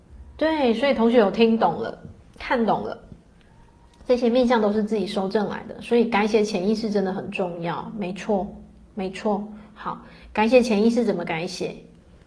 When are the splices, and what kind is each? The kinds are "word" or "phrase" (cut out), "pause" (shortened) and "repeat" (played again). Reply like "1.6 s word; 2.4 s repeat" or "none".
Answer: none